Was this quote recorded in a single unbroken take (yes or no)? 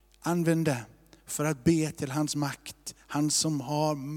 yes